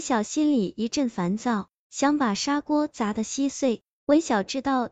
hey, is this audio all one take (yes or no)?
yes